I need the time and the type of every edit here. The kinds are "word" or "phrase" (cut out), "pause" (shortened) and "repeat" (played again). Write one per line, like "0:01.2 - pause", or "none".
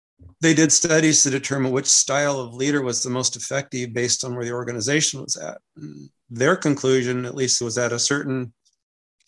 0:07.6 - word